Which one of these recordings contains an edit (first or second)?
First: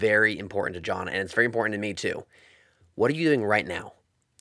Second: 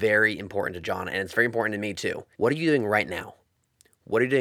second